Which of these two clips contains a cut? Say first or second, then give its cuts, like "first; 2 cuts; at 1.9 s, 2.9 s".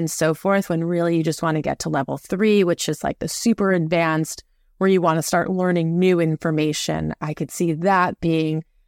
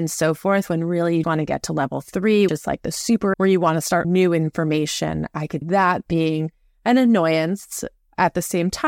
second; 5 cuts; at 1.2 s, 2.5 s, 3.3 s, 4.0 s, 5.6 s